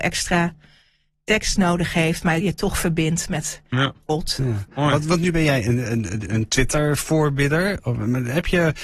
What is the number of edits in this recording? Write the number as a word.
zero